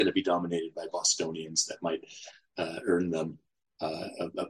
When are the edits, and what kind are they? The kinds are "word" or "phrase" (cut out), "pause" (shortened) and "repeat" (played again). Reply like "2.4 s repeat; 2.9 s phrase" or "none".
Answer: none